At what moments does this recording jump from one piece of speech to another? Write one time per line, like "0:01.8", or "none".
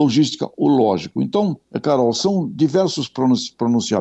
0:01.6